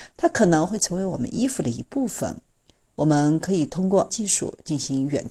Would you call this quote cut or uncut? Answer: cut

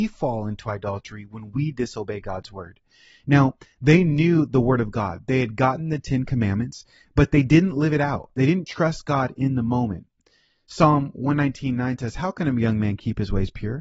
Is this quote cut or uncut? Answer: uncut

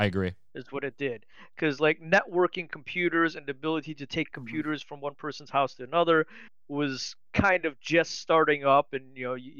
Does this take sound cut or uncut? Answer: uncut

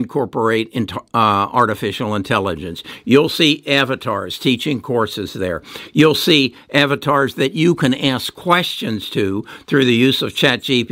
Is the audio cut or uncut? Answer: uncut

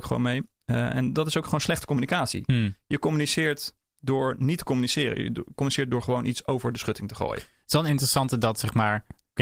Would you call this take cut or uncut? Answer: uncut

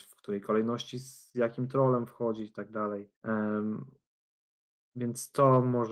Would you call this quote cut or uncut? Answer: cut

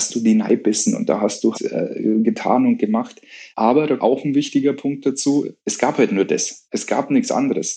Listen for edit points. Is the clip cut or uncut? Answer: cut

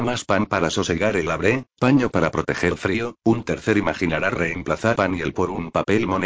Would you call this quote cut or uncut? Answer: cut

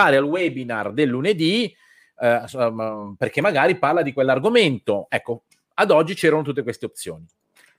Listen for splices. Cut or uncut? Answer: uncut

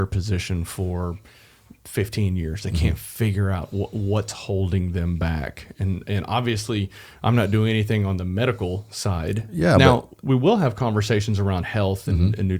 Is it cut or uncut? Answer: uncut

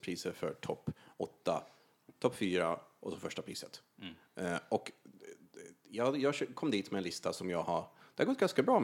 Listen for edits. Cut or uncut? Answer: uncut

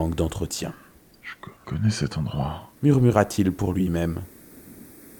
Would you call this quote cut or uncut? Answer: cut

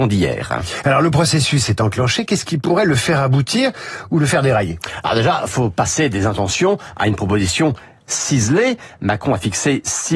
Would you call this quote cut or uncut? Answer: uncut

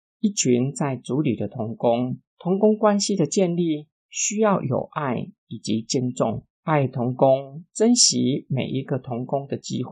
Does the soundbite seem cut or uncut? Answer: cut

